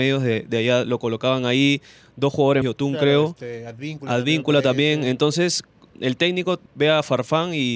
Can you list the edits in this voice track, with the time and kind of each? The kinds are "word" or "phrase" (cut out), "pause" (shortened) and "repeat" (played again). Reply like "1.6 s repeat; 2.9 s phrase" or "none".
2.6 s word; 5.9 s word; 6.7 s pause